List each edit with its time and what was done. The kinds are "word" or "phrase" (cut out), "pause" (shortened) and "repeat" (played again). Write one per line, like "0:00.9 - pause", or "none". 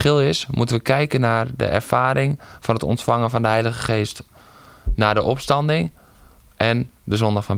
none